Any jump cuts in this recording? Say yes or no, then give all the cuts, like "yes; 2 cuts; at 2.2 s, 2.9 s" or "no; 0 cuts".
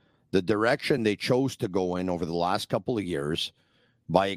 no; 0 cuts